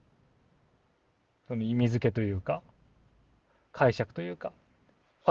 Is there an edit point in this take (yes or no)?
no